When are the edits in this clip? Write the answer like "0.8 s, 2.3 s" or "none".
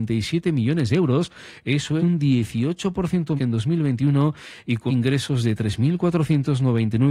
2.0 s, 3.4 s, 4.9 s